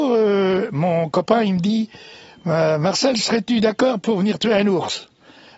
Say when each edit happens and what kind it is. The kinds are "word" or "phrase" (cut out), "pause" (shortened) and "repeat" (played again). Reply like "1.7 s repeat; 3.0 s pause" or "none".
none